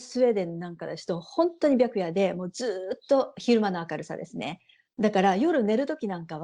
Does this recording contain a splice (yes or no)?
yes